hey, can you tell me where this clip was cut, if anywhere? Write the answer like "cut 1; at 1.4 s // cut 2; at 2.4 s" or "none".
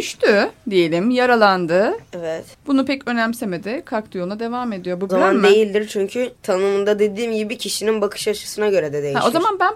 cut 1; at 2.5 s // cut 2; at 5.1 s // cut 3; at 6.4 s